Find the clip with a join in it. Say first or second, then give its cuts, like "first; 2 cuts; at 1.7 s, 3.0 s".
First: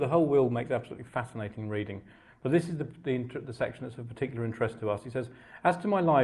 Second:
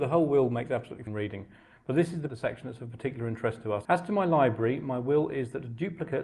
second; 3 cuts; at 1.1 s, 2.3 s, 3.8 s